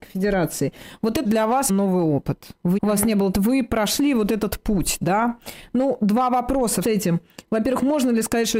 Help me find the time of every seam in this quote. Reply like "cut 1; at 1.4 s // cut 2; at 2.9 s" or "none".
cut 1; at 1.2 s // cut 2; at 1.7 s // cut 3; at 2.8 s // cut 4; at 3.3 s // cut 5; at 6.8 s